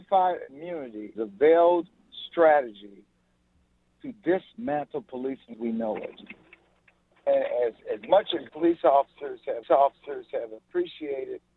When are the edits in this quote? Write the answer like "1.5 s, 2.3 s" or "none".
1.2 s, 5.5 s, 8.0 s, 8.5 s, 9.6 s